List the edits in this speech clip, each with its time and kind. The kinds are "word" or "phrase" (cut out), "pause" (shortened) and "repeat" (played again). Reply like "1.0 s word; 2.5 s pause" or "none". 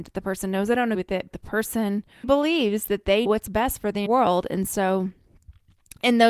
0.9 s word; 1.3 s word; 2.2 s word; 3.3 s word; 4.1 s word